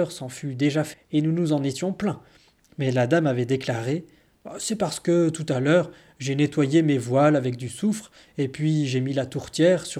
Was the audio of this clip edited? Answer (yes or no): yes